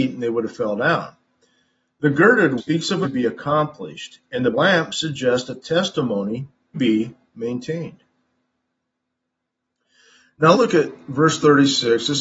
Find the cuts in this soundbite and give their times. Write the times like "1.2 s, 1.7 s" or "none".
2.6 s, 3.0 s, 4.5 s, 6.7 s, 10.5 s